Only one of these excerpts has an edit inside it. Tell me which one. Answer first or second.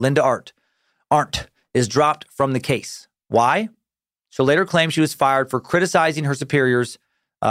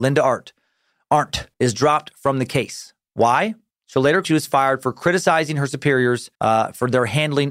second